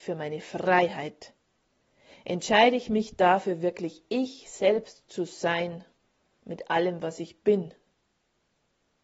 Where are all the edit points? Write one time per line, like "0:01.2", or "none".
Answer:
none